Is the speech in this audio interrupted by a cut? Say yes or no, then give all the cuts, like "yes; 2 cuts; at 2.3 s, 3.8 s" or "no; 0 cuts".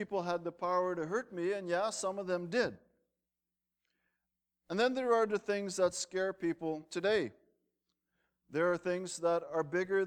no; 0 cuts